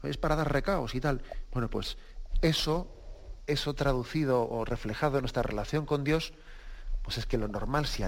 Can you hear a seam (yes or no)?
no